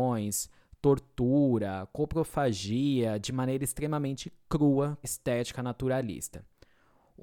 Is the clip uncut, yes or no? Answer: no